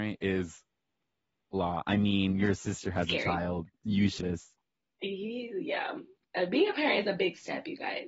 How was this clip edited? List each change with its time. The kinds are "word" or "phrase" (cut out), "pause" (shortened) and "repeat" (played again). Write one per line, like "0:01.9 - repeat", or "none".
0:01.5 - word
0:04.2 - word